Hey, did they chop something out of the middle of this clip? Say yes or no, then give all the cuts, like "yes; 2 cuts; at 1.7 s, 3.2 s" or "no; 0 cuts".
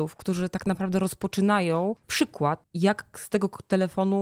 yes; 1 cut; at 2.0 s